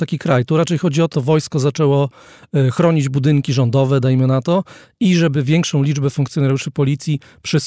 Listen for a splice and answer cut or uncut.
cut